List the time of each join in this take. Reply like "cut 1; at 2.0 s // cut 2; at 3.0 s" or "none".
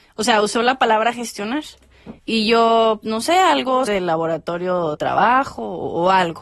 cut 1; at 2.2 s // cut 2; at 3.0 s // cut 3; at 3.9 s // cut 4; at 4.9 s